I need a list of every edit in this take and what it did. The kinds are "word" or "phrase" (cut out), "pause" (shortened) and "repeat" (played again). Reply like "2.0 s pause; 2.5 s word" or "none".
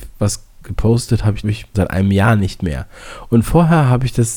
1.4 s word; 1.7 s word

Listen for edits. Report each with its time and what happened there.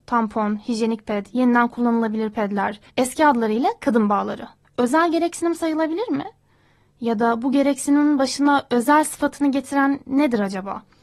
2.9 s pause; 4.6 s pause

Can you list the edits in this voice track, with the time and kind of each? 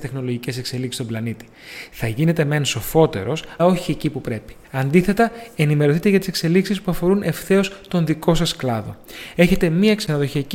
3.6 s word; 4.6 s pause

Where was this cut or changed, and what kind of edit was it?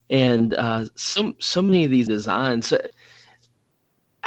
2.1 s phrase

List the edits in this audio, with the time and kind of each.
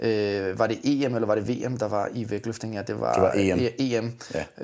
none

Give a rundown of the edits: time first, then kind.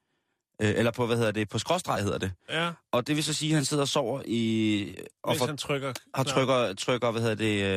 none

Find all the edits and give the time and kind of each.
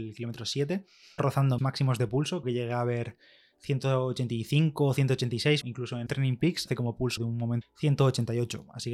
1.2 s word; 1.6 s word; 2.4 s word; 5.6 s word; 6.1 s word; 6.7 s word; 7.2 s word; 7.6 s word

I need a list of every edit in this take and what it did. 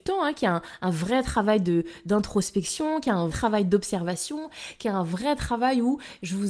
3.3 s word

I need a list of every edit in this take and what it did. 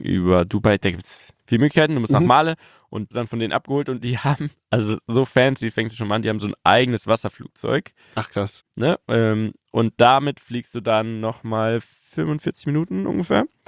1.4 s pause; 3.1 s phrase

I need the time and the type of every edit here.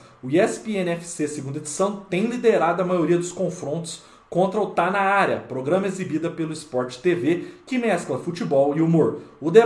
none

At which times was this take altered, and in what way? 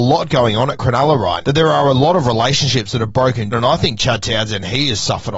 1.4 s word; 3.5 s word

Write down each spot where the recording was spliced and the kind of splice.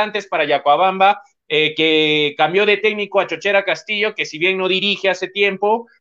none

